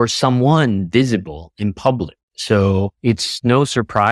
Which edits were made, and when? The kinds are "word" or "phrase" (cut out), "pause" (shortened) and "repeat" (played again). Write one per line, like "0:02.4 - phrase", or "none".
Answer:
0:02.9 - pause